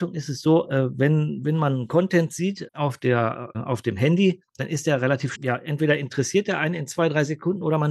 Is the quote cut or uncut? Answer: cut